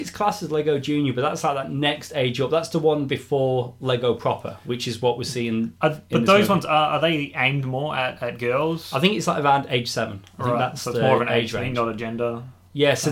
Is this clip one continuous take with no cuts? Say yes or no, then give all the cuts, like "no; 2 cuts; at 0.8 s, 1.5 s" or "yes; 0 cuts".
yes; 0 cuts